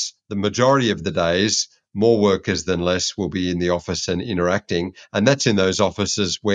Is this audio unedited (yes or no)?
yes